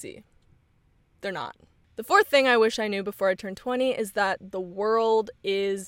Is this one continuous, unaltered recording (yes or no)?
yes